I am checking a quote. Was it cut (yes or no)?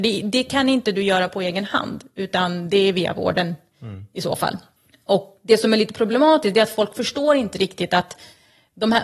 yes